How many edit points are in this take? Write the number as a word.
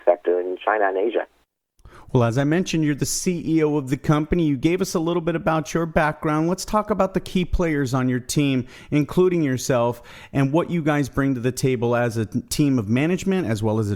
zero